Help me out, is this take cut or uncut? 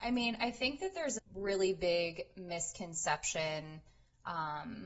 cut